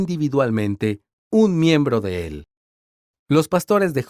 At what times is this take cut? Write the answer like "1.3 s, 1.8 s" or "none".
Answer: none